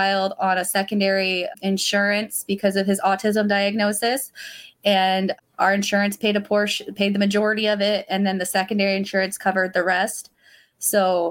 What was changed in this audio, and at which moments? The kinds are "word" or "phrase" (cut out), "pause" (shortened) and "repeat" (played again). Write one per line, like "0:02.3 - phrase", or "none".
none